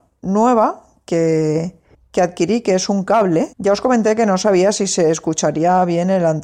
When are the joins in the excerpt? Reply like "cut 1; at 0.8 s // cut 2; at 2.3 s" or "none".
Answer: cut 1; at 1.9 s // cut 2; at 3.5 s